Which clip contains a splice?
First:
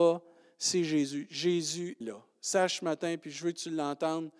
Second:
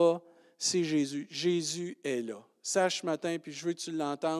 first; 1 cut; at 2.0 s

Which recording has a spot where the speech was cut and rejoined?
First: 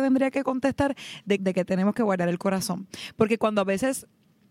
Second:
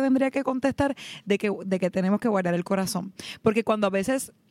first; 1 cut; at 1.4 s

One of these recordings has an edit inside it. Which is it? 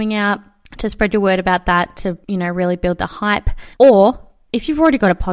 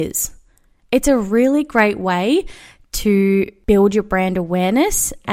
first; 2 cuts; at 2.2 s, 3.8 s

